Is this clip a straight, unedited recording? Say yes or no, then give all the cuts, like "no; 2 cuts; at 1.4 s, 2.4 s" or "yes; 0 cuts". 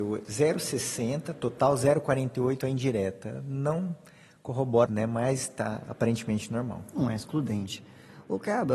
no; 1 cut; at 4.9 s